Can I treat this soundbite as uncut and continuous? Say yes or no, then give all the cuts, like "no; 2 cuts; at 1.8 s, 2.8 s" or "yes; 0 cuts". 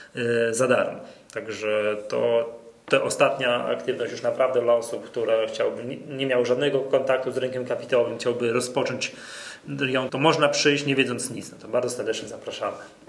no; 1 cut; at 10.1 s